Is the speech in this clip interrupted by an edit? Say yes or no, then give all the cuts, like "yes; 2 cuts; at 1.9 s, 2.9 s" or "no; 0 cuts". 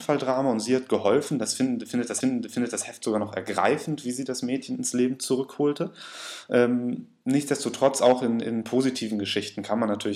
yes; 1 cut; at 2.2 s